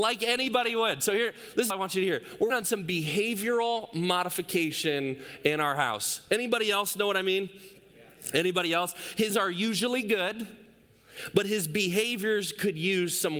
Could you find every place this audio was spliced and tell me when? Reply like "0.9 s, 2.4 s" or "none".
1.7 s, 2.5 s, 9.3 s

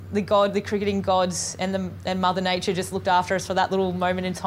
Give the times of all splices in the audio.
none

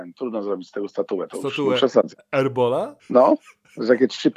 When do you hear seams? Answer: 3.0 s

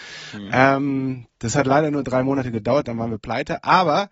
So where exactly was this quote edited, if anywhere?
none

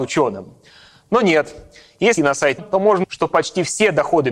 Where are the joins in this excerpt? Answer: 2.2 s, 2.6 s, 3.0 s

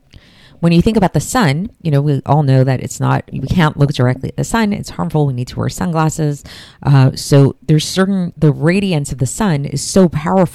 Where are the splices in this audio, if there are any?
1.7 s

